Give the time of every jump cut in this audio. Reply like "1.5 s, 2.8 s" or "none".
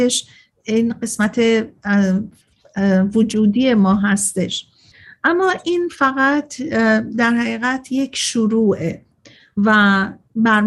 none